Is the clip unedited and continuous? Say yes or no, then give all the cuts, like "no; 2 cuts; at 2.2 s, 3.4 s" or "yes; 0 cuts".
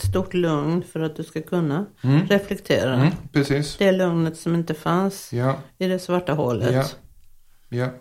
yes; 0 cuts